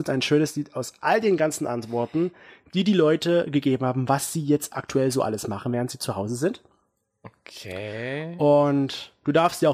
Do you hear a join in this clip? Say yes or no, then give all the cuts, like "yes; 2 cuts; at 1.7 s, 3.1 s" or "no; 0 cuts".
no; 0 cuts